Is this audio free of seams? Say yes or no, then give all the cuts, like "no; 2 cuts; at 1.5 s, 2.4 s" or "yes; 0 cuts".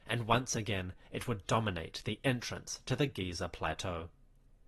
yes; 0 cuts